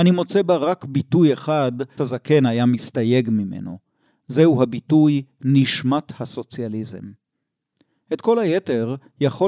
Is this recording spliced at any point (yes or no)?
yes